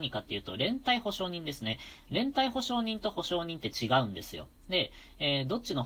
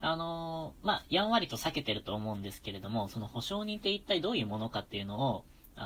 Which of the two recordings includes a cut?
first; 1 cut; at 4.6 s

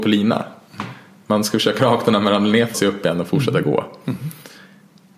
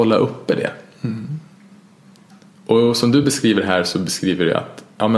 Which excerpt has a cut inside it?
first; 2 cuts; at 1.8 s, 2.7 s

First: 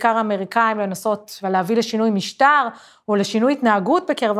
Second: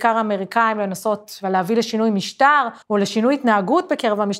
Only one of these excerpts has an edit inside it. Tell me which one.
second; 1 cut; at 2.8 s

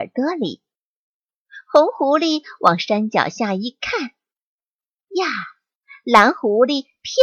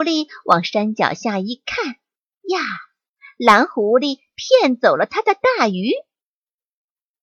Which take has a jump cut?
second; 1 cut; at 2.2 s

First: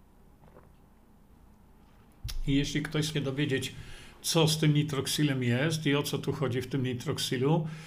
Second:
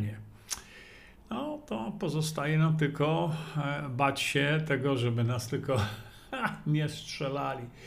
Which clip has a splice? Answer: first; 1 cut; at 3.1 s

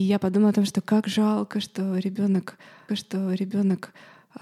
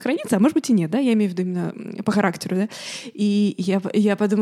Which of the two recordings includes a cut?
first; 1 cut; at 2.9 s

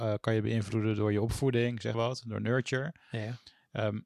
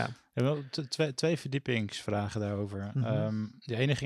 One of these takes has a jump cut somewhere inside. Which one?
first; 1 cut; at 1.9 s

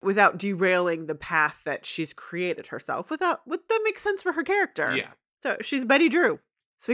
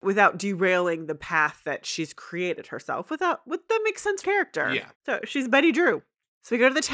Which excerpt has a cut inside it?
second; 2 cuts; at 4.2 s, 5.0 s

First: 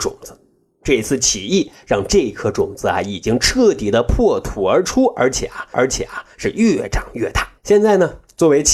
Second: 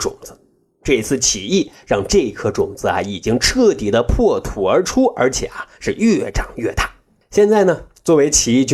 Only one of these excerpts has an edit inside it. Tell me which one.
first; 2 cuts; at 5.7 s, 7.6 s

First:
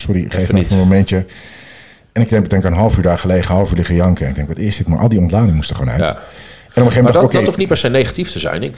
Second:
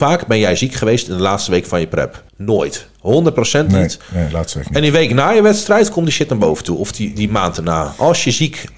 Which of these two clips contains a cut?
second; 1 cut; at 2.3 s

